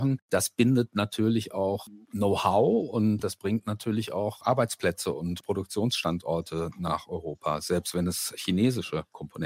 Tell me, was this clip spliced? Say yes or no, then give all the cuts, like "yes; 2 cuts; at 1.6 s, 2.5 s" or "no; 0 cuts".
no; 0 cuts